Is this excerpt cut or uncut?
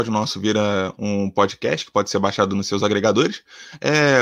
uncut